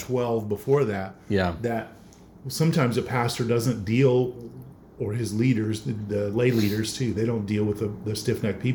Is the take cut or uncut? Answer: uncut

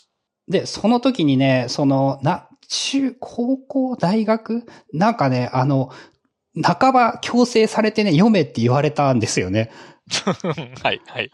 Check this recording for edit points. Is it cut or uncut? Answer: uncut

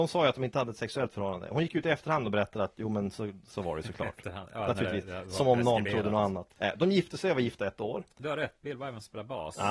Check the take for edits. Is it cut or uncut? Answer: cut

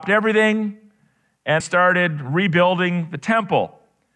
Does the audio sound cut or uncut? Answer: cut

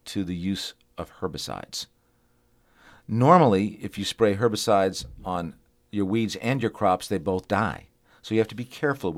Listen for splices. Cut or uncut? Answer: uncut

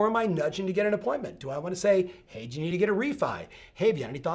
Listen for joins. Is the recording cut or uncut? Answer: uncut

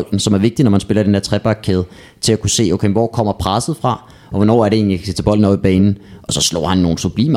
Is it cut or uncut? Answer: uncut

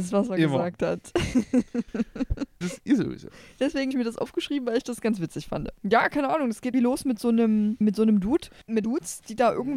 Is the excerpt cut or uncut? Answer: cut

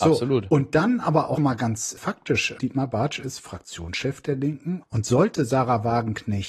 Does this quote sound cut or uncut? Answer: cut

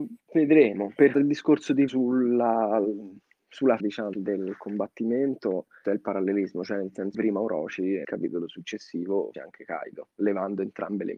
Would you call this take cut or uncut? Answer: cut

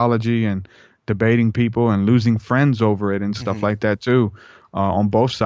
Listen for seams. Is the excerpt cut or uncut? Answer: uncut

